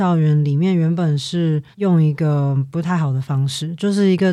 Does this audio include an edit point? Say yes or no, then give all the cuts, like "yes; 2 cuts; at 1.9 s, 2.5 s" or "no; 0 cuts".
yes; 1 cut; at 1.7 s